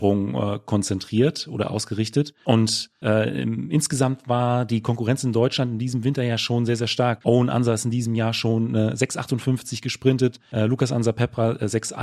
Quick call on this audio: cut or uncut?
uncut